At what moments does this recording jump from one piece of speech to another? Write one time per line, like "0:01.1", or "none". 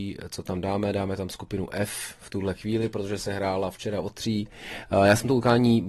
none